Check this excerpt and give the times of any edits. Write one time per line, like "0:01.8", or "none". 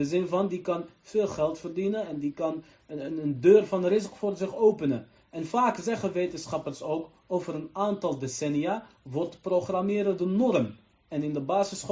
none